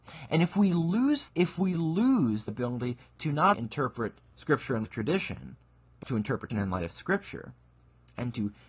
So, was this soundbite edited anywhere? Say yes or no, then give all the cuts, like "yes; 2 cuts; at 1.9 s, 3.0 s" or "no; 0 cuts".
yes; 6 cuts; at 1.3 s, 2.5 s, 3.5 s, 4.8 s, 6.0 s, 6.5 s